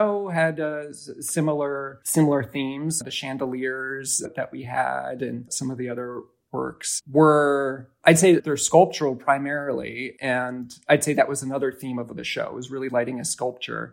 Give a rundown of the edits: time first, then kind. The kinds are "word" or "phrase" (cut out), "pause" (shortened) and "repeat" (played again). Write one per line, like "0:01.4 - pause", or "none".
0:08.0 - pause